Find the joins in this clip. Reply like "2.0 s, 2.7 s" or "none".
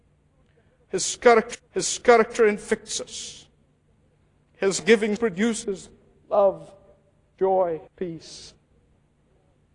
1.5 s, 4.8 s, 5.2 s, 7.9 s